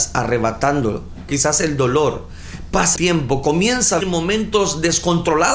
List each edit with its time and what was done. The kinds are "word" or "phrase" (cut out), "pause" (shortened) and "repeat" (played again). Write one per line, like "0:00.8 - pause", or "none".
0:01.3 - word
0:03.0 - word
0:04.0 - word

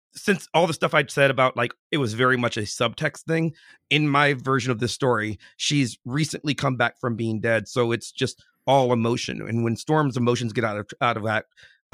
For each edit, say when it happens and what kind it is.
none

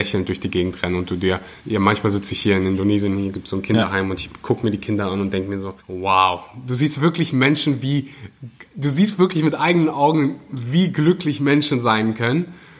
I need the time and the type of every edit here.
0:01.6 - pause
0:05.8 - pause

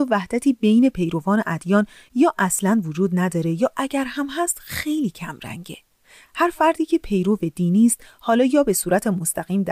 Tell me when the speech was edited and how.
none

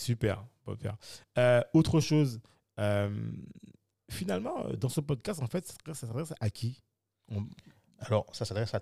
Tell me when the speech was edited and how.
none

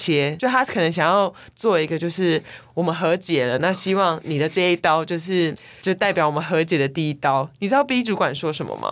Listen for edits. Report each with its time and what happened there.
none

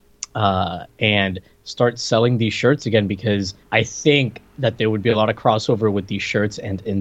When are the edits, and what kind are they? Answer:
0:03.6 - pause

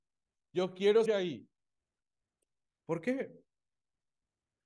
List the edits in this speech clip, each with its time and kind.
0:01.1 - word

